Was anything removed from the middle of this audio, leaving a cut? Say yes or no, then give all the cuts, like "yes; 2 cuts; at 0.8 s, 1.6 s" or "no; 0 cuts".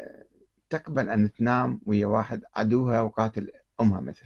yes; 1 cut; at 2.5 s